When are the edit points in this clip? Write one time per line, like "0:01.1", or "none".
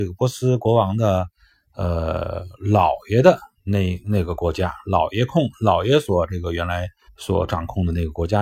0:07.1